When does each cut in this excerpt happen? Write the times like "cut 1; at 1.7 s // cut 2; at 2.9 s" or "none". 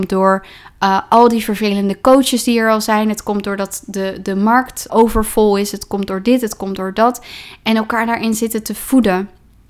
cut 1; at 4.9 s